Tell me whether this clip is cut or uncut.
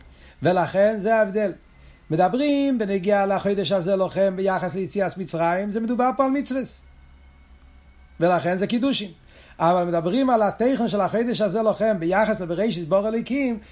uncut